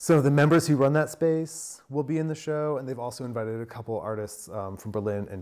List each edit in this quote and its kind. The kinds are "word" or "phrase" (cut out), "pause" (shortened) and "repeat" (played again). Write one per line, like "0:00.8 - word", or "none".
none